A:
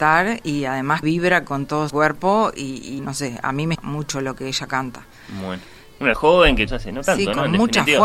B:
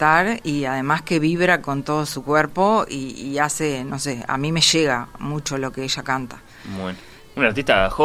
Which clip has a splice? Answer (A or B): A